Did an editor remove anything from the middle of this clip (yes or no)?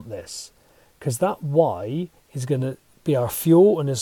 no